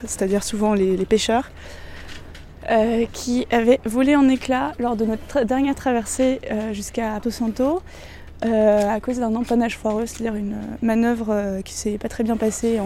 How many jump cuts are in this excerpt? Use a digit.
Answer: 1